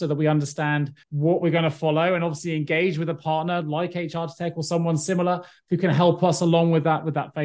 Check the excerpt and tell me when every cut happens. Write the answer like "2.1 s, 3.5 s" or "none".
1.0 s

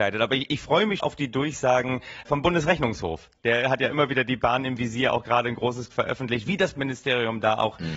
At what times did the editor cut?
1.0 s, 2.2 s, 5.9 s, 6.7 s

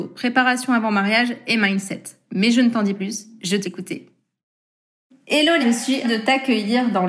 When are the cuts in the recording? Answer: 2.9 s, 3.6 s, 5.6 s, 6.0 s

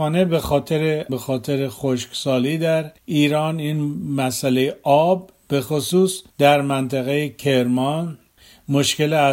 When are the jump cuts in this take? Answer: 1.1 s, 3.0 s, 6.3 s

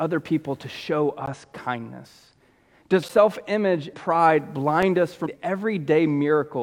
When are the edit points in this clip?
3.0 s, 3.9 s, 5.3 s

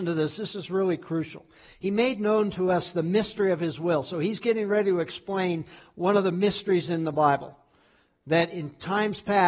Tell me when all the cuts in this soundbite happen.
none

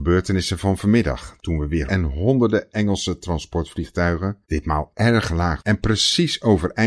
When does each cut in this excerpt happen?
1.4 s, 1.9 s, 4.4 s, 5.6 s

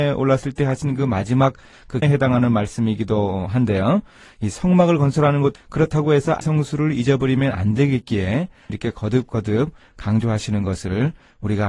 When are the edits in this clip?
2.0 s, 5.6 s, 6.4 s, 8.7 s

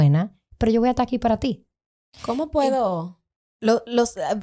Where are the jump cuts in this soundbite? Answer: none

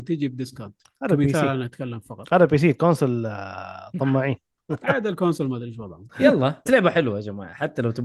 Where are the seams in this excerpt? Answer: 6.7 s

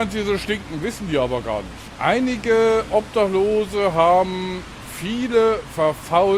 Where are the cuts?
none

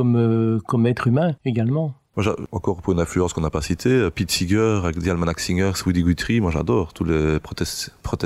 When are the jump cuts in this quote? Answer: none

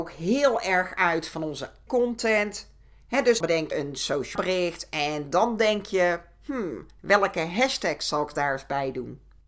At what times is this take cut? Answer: 1.9 s, 3.4 s, 3.7 s, 4.4 s

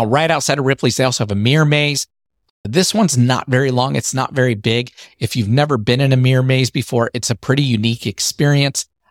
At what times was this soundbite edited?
none

